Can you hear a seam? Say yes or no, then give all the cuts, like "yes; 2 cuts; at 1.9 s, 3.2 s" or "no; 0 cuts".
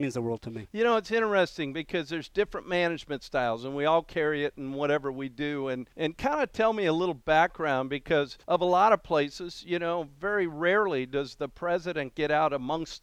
yes; 2 cuts; at 5.9 s, 8.4 s